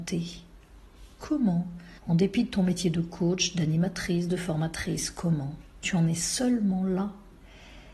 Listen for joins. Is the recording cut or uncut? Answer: cut